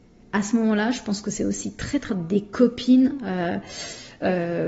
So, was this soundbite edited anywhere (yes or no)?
yes